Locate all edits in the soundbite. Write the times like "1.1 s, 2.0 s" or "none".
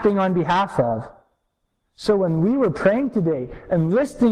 none